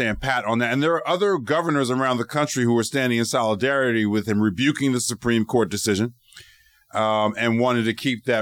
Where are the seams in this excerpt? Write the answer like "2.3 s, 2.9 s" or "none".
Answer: none